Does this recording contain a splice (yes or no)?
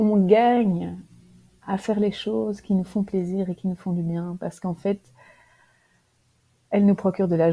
no